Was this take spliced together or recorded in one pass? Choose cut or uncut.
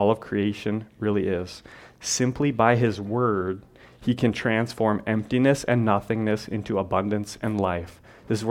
uncut